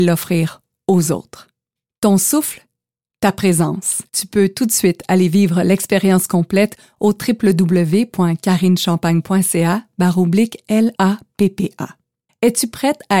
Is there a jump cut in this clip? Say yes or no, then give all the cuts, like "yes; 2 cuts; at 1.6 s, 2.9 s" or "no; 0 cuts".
yes; 1 cut; at 4.1 s